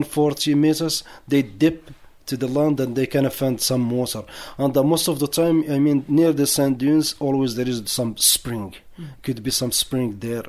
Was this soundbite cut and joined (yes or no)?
no